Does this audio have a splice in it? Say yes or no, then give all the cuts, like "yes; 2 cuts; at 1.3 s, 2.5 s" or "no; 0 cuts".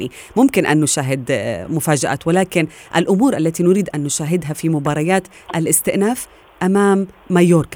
no; 0 cuts